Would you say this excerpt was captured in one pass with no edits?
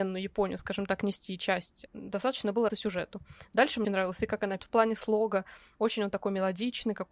no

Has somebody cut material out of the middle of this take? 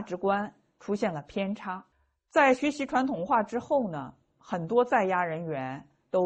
yes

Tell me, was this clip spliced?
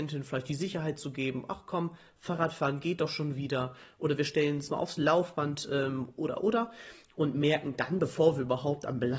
no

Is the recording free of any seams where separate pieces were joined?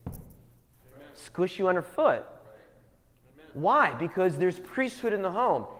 yes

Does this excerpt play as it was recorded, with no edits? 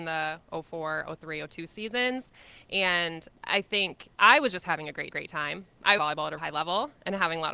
no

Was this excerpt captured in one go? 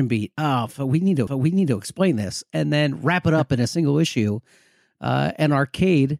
no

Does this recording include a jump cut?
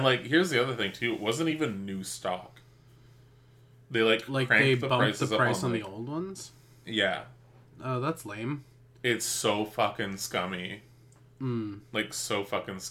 no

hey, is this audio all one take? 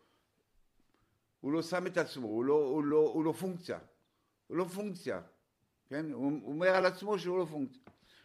yes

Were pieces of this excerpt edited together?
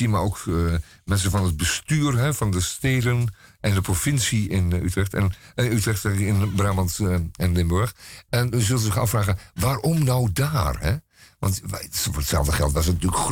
no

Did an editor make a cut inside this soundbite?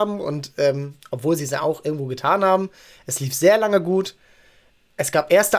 no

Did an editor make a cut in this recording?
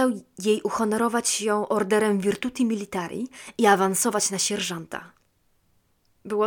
no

